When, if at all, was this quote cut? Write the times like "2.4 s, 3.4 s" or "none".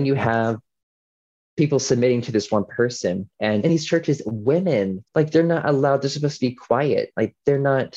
3.3 s, 5.1 s